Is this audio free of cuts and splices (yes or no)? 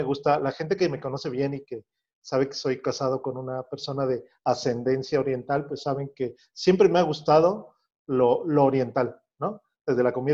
yes